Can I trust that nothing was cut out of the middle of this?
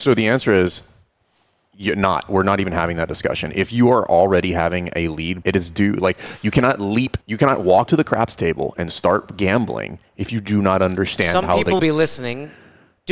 no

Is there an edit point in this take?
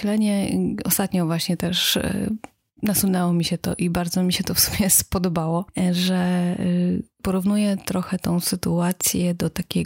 no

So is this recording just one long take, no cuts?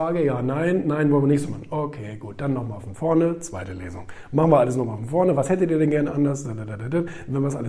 yes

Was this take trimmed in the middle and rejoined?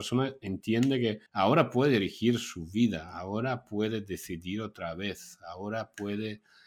yes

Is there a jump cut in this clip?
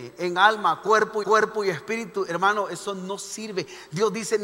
yes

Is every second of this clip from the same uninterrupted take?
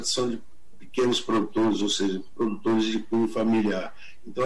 yes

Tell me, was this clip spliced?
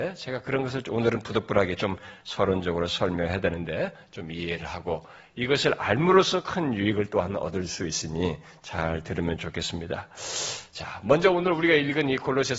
no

